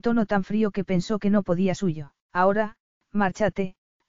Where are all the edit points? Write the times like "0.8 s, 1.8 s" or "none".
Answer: 1.8 s, 2.2 s